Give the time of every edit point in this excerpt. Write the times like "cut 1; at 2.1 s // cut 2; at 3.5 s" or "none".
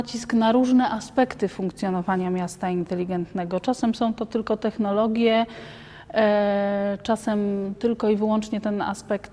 none